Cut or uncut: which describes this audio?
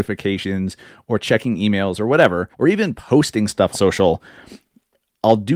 cut